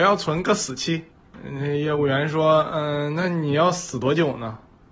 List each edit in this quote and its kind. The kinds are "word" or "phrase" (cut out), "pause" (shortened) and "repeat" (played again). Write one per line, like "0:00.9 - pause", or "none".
0:01.1 - pause